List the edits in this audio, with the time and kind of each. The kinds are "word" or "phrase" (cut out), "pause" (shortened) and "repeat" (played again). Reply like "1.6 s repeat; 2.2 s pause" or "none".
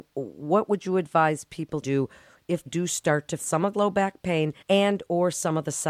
1.8 s word; 2.7 s word; 3.4 s word; 3.7 s word; 4.6 s pause